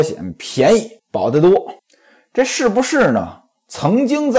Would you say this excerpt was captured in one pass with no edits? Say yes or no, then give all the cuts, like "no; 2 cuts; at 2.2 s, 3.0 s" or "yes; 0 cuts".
no; 2 cuts; at 1.0 s, 1.8 s